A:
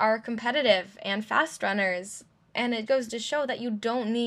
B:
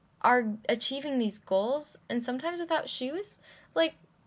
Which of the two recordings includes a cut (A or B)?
A